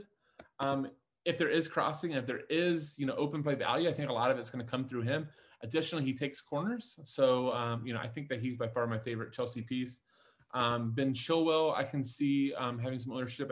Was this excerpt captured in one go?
yes; 0 cuts

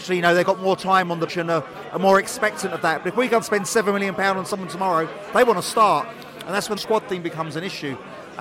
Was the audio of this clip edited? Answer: yes; 3 cuts; at 1.3 s, 3.4 s, 6.8 s

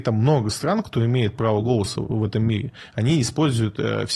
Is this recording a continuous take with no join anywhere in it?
yes; 0 cuts

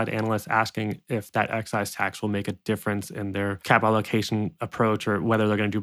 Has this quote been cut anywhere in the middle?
no; 0 cuts

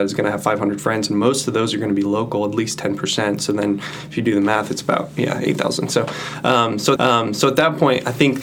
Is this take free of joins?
no; 1 cut; at 7.0 s

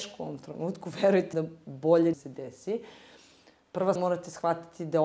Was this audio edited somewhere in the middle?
yes; 3 cuts; at 1.3 s, 2.1 s, 4.0 s

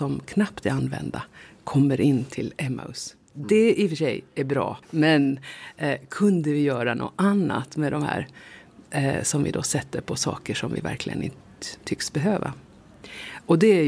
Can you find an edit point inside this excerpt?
yes; 2 cuts; at 4.8 s, 8.9 s

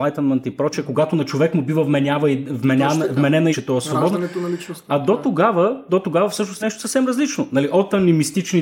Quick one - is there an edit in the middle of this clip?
yes; 2 cuts; at 3.5 s, 6.6 s

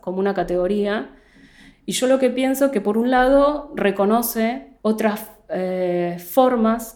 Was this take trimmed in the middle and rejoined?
yes; 1 cut; at 4.8 s

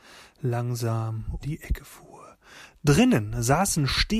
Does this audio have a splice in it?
yes; 1 cut; at 1.4 s

